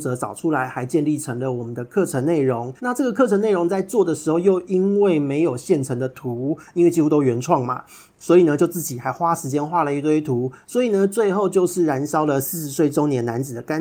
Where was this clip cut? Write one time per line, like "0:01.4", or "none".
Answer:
0:02.8